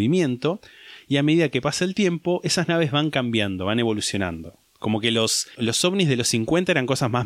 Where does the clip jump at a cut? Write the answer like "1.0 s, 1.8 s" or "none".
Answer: 5.5 s